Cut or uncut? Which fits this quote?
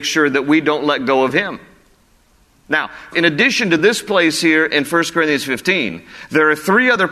uncut